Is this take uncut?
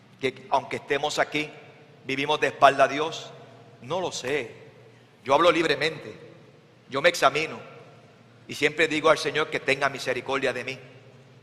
yes; 0 cuts

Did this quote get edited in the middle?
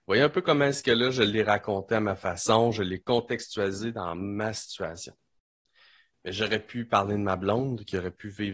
no; 0 cuts

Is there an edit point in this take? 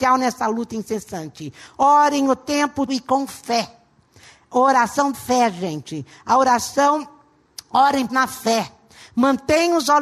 yes; 3 cuts; at 2.9 s, 5.1 s, 8.1 s

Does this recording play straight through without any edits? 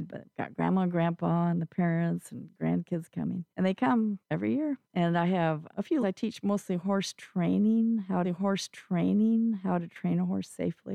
no; 6 cuts; at 3.5 s, 4.2 s, 4.8 s, 5.7 s, 6.0 s, 8.2 s

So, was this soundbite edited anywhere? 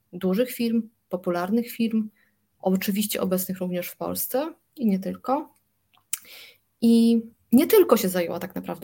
no; 0 cuts

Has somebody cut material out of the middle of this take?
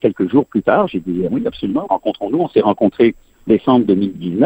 yes; 3 cuts; at 1.3 s, 1.9 s, 3.5 s

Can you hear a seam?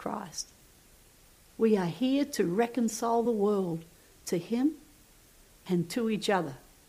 no; 0 cuts

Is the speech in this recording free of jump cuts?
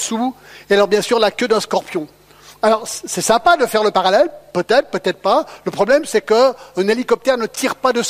yes; 0 cuts

